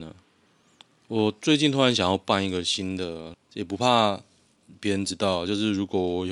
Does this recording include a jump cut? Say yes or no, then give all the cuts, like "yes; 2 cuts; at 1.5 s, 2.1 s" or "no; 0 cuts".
yes; 1 cut; at 3.3 s